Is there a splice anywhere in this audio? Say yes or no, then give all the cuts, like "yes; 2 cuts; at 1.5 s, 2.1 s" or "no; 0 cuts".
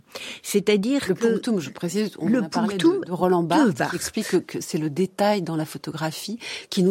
no; 0 cuts